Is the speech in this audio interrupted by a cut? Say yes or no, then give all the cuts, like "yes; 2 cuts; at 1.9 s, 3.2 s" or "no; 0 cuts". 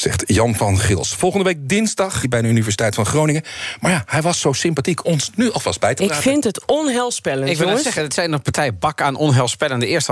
yes; 2 cuts; at 2.2 s, 5.0 s